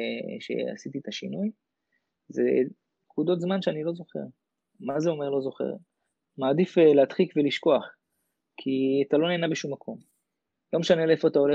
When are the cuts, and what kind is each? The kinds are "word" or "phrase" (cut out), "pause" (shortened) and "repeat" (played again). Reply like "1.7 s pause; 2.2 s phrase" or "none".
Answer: none